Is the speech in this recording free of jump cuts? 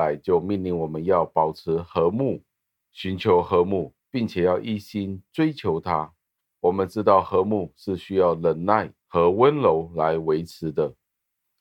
no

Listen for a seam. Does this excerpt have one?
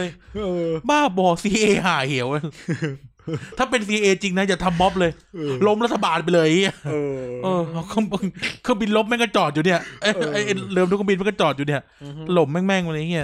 no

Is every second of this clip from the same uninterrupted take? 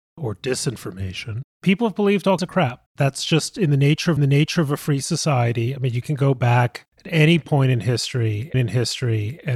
no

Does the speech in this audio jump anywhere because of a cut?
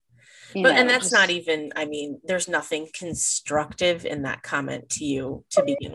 no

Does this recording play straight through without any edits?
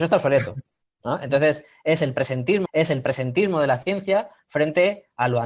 no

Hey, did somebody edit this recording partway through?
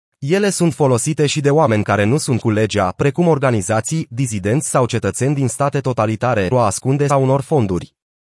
yes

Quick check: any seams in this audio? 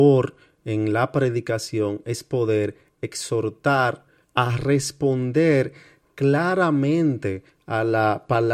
no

